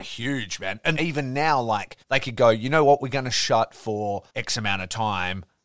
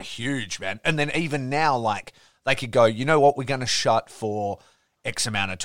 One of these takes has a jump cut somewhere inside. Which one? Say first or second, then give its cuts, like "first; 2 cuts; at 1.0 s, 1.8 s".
first; 3 cuts; at 1.0 s, 2.0 s, 4.3 s